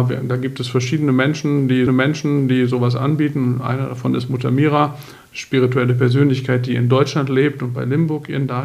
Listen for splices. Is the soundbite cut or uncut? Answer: cut